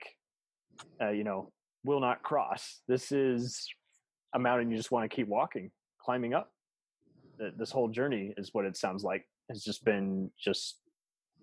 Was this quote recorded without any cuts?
yes; 0 cuts

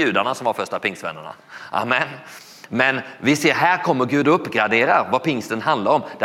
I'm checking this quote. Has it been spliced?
no; 0 cuts

